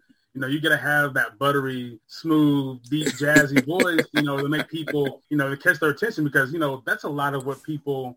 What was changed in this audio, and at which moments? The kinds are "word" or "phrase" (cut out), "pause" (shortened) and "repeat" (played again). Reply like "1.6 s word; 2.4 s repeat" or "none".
2.0 s pause; 5.2 s pause